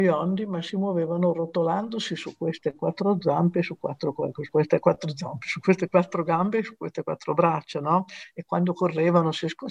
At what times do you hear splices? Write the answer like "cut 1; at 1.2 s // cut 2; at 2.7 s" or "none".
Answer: cut 1; at 4.5 s